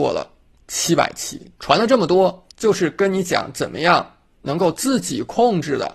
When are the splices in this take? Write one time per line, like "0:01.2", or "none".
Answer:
0:01.6
0:02.5

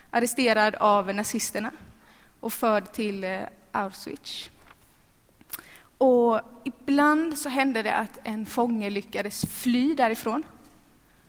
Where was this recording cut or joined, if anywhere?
none

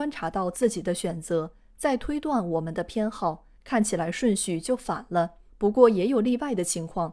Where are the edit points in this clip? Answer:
0:03.6
0:05.5

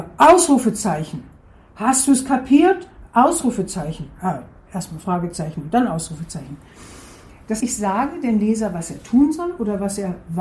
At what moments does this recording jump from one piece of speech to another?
0:07.6

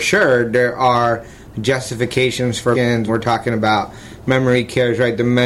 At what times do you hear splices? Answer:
0:02.7
0:03.1

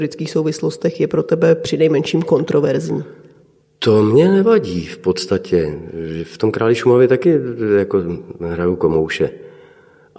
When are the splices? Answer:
0:03.6

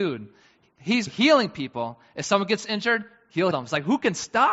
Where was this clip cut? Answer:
0:01.1
0:03.5

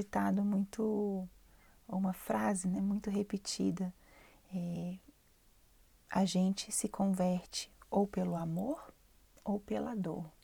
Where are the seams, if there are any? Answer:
none

